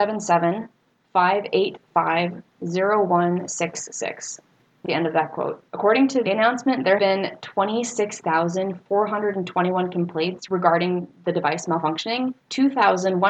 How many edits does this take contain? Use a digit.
5